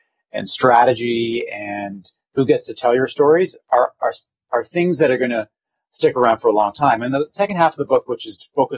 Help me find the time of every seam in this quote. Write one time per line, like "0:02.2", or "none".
none